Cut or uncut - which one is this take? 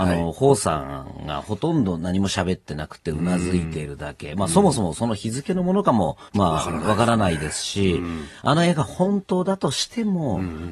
cut